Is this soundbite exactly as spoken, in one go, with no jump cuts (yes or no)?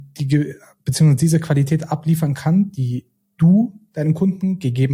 yes